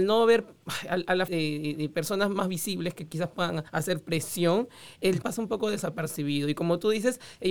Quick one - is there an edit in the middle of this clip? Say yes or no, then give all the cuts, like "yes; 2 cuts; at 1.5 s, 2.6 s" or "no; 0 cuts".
yes; 3 cuts; at 1.3 s, 3.7 s, 5.2 s